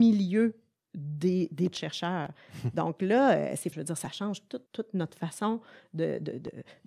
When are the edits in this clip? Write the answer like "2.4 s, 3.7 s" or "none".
1.7 s, 3.7 s, 4.7 s